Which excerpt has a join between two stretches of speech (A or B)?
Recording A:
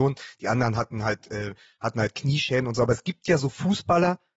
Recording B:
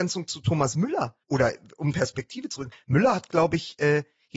B